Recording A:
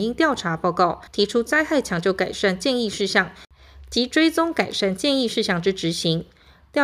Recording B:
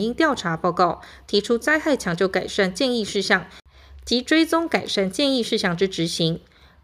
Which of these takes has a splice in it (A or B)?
A